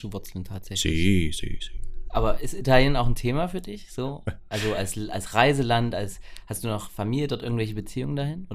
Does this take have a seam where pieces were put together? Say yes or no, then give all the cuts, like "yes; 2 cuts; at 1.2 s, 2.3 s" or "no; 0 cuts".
no; 0 cuts